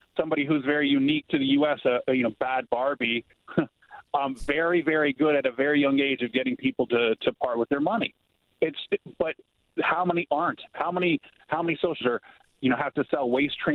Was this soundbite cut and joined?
yes; 2 cuts; at 7.2 s, 12.0 s

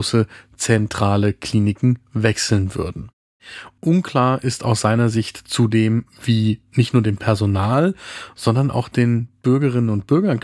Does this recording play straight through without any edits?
yes; 0 cuts

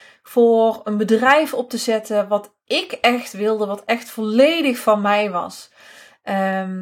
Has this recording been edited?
no; 0 cuts

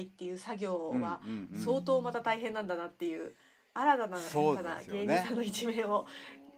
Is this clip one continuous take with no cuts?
yes; 0 cuts

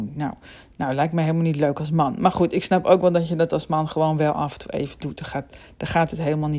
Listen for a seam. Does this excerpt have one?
no; 0 cuts

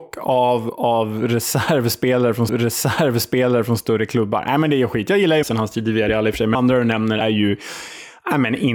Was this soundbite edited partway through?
yes; 4 cuts; at 2.5 s, 5.4 s, 6.5 s, 7.2 s

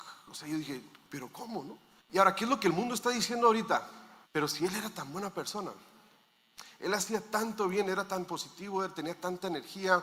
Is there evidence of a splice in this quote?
yes; 3 cuts; at 1.0 s, 2.0 s, 4.2 s

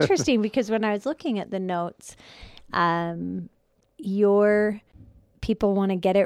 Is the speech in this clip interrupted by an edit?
no; 0 cuts

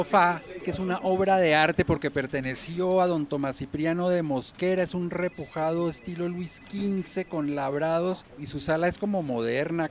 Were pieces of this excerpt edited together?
no; 0 cuts

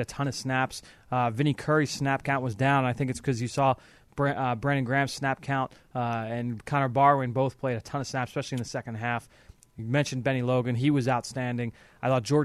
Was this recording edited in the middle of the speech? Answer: no; 0 cuts

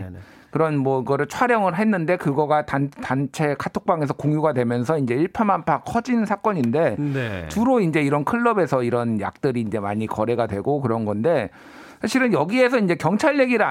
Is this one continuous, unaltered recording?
yes; 0 cuts

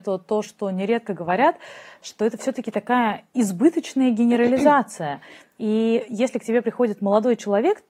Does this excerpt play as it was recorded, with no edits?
yes; 0 cuts

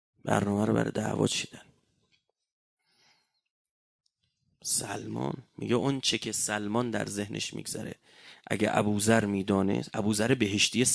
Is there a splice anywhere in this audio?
no; 0 cuts

